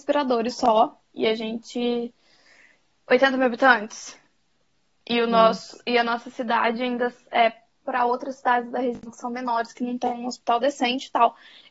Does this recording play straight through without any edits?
no; 1 cut; at 7.8 s

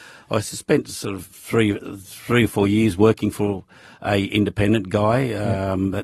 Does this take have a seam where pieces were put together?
no; 0 cuts

